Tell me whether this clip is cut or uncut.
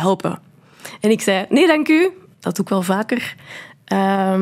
uncut